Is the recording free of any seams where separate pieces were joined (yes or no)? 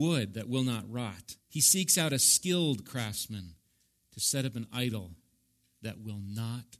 no